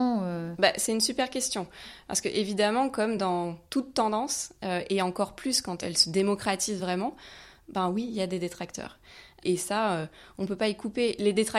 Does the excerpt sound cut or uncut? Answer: uncut